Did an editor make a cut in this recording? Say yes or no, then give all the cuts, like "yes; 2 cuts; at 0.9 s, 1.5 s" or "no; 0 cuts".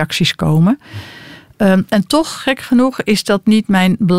no; 0 cuts